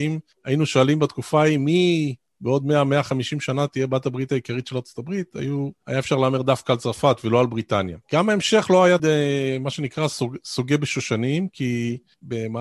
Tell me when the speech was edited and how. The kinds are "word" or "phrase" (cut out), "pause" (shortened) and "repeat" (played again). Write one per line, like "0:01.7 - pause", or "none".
0:08.0 - pause
0:09.0 - word